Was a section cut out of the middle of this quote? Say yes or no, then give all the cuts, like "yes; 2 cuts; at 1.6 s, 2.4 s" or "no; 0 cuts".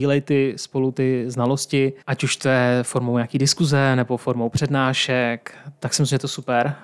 yes; 1 cut; at 2.0 s